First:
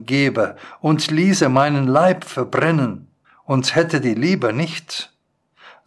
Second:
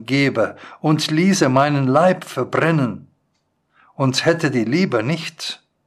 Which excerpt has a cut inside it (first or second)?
first